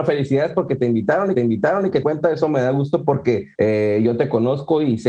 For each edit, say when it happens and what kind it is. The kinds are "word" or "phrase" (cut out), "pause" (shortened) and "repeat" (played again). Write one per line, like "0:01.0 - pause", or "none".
0:01.3 - repeat
0:02.0 - phrase
0:03.5 - pause